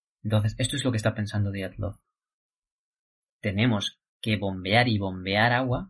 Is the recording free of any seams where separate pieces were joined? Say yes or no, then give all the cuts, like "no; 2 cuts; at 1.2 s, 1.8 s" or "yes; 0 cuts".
no; 1 cut; at 4.1 s